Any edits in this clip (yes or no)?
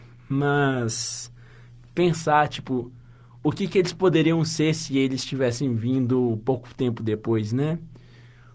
no